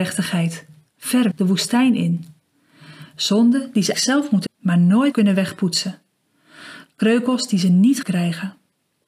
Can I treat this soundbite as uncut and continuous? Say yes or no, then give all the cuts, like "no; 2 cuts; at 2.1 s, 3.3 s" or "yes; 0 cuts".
no; 5 cuts; at 1.3 s, 3.9 s, 4.5 s, 5.1 s, 8.0 s